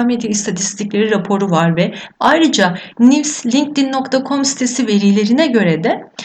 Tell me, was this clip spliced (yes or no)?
no